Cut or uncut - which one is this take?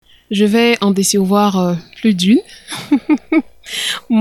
uncut